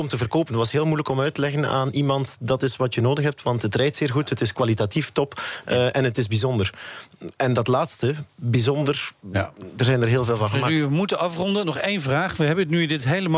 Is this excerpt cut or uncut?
uncut